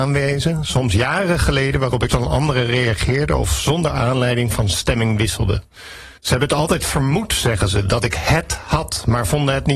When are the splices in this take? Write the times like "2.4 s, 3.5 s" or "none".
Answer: 2.1 s, 6.2 s